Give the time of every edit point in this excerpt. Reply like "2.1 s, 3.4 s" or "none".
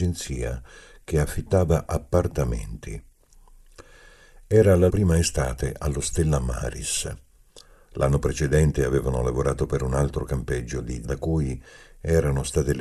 4.9 s, 11.0 s